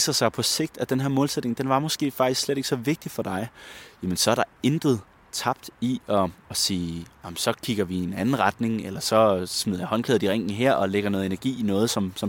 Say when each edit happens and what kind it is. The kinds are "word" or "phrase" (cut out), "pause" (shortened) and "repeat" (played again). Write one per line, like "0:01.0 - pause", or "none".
0:06.4 - pause
0:07.2 - pause

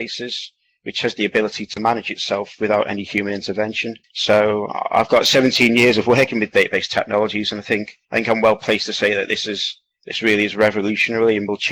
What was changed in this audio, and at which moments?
0:04.0 - pause
0:08.0 - pause

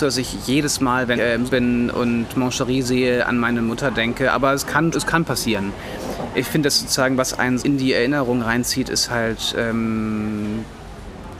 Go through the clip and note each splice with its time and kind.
0:01.1 - word
0:01.5 - word
0:04.9 - word
0:07.6 - word

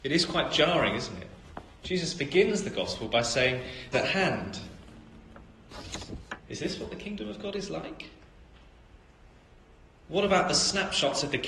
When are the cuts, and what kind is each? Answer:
0:03.9 - phrase

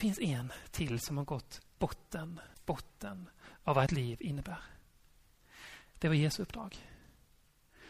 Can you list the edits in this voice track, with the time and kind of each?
0:01.8 - word
0:02.5 - pause
0:03.9 - phrase

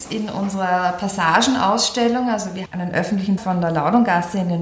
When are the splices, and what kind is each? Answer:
0:02.6 - word
0:03.4 - word

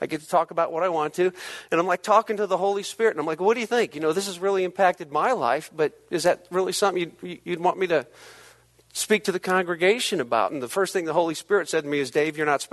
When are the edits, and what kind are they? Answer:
none

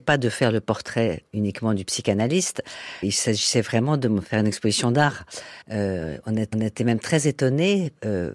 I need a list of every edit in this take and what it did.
0:03.0 - word
0:05.6 - pause
0:06.5 - repeat

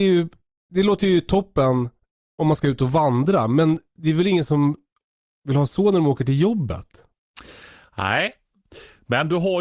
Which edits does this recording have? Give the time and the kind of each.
none

